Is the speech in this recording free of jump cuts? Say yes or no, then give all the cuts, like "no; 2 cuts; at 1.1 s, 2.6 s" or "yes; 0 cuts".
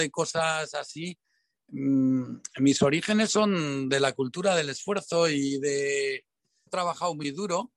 no; 1 cut; at 6.7 s